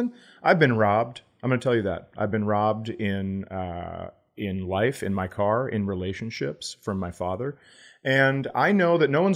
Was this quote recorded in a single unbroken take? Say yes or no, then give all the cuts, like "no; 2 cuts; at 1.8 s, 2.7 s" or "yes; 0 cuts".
yes; 0 cuts